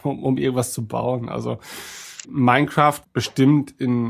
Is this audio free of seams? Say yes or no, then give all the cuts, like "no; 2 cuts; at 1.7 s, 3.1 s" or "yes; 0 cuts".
no; 2 cuts; at 2.2 s, 3.0 s